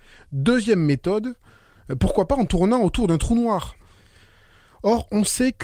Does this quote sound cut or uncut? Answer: uncut